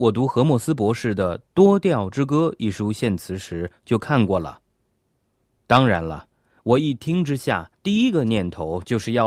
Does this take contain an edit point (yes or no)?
yes